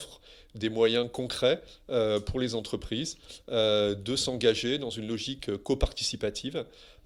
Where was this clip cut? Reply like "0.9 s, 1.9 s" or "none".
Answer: none